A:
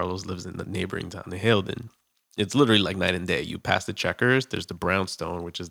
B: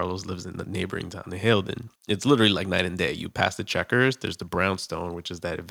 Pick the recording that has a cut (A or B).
B